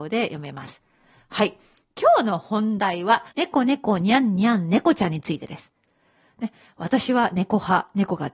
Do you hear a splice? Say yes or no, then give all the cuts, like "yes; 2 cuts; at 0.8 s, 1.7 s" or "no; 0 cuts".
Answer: yes; 1 cut; at 3.3 s